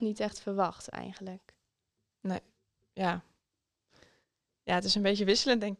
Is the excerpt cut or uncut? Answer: uncut